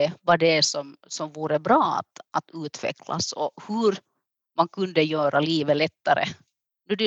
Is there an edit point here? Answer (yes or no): no